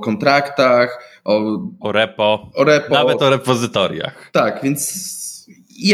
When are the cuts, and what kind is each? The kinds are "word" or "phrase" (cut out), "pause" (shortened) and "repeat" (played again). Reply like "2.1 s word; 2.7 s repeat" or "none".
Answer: none